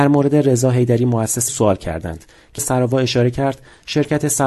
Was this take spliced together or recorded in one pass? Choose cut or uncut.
cut